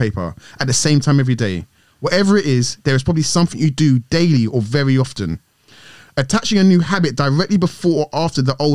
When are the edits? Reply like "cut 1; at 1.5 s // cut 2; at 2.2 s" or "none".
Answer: none